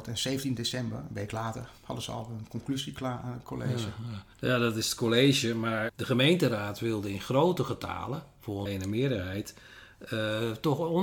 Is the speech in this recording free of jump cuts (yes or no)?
no